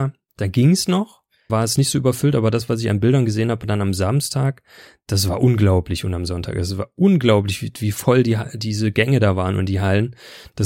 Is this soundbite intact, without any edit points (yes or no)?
no